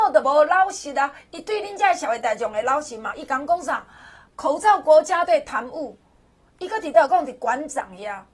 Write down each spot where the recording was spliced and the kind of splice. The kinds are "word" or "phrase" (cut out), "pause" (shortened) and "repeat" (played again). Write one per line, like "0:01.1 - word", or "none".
none

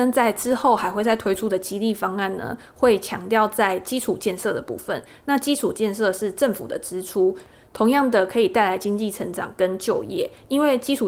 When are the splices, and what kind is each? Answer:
none

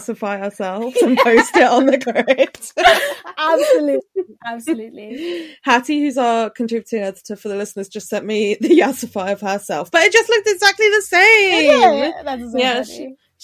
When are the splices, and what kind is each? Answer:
none

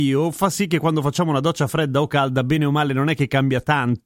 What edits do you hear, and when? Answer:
none

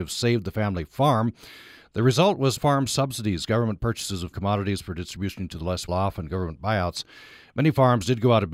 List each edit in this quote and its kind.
0:02.6 - word
0:04.3 - word
0:05.9 - word

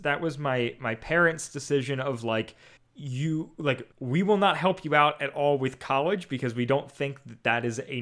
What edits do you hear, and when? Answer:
0:02.8 - pause
0:03.9 - pause

